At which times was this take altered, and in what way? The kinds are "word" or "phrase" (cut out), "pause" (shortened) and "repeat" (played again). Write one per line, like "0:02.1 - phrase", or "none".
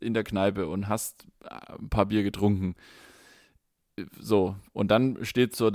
none

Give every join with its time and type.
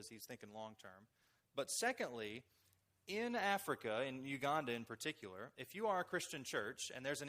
none

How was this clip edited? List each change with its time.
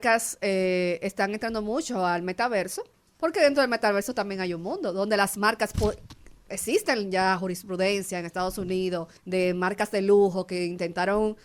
0:09.2 - pause

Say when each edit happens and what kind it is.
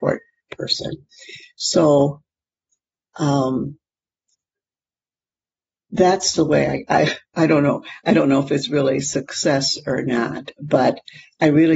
none

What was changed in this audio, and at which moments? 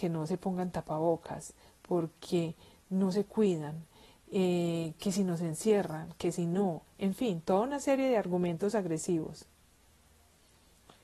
none

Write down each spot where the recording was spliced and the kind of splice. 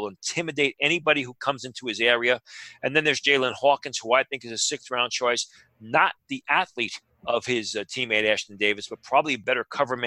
none

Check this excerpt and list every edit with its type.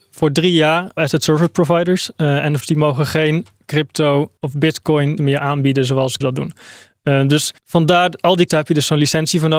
0:01.0 - phrase
0:02.6 - word
0:04.4 - pause
0:05.2 - word
0:06.2 - word
0:07.6 - pause
0:08.5 - word

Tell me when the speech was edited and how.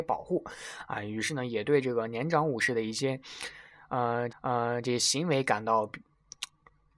0:04.3 - repeat

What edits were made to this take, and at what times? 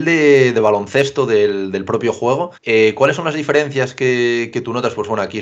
0:02.6 - pause

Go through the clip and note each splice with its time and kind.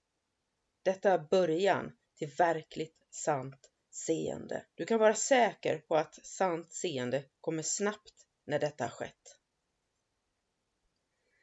0:04.7 - pause
0:07.3 - pause

